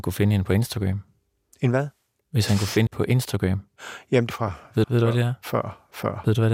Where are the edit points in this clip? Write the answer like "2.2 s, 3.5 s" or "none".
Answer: 2.9 s, 4.3 s, 4.8 s